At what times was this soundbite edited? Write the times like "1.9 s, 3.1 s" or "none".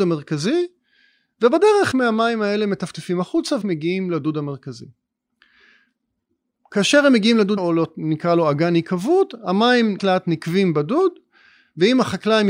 1.9 s, 3.6 s, 7.6 s, 10.0 s